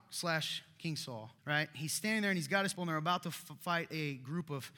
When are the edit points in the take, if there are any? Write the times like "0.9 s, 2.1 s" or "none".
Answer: 1.4 s, 2.7 s